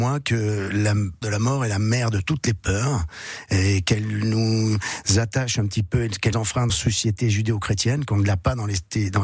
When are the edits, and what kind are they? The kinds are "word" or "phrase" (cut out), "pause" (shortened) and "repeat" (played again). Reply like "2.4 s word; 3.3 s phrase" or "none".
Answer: 1.2 s word; 6.3 s word; 6.7 s word